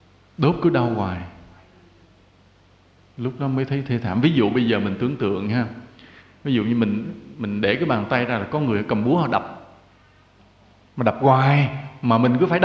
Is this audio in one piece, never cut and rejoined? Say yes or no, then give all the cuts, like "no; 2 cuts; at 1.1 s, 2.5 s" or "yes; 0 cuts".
yes; 0 cuts